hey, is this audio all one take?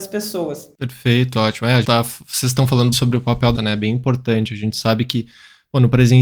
no; 3 cuts; at 1.8 s, 2.9 s, 3.5 s

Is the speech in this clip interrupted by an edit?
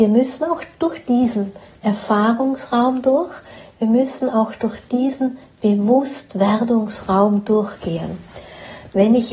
no; 0 cuts

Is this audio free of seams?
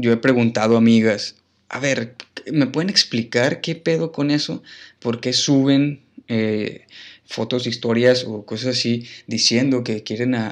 yes; 0 cuts

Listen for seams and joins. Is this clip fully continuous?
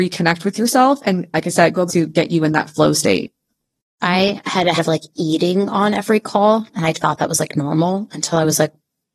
no; 3 cuts; at 1.9 s, 4.8 s, 6.9 s

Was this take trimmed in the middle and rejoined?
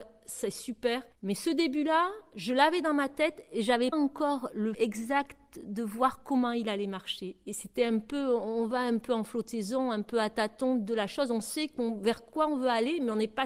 yes; 3 cuts; at 1.1 s, 3.9 s, 4.7 s

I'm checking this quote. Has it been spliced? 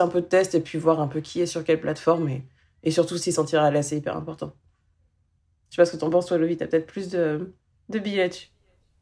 no; 0 cuts

